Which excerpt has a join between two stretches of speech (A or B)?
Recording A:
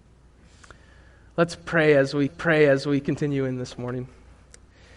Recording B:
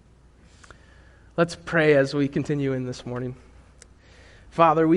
A